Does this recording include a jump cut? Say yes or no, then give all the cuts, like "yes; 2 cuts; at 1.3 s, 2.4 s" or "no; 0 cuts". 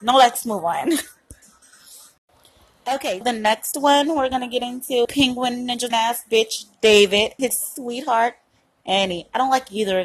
yes; 4 cuts; at 3.2 s, 5.0 s, 5.9 s, 7.4 s